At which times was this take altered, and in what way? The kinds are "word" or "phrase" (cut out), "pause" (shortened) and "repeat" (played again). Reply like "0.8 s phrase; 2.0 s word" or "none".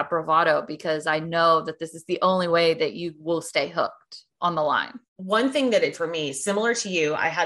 5.1 s pause; 5.9 s word